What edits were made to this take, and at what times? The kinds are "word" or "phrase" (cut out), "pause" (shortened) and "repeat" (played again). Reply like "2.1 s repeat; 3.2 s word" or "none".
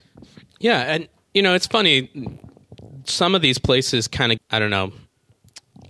4.4 s word